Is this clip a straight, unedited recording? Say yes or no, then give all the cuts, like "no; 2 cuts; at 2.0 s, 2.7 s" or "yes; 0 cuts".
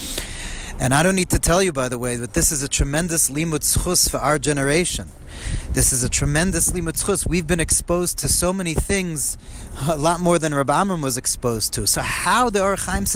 yes; 0 cuts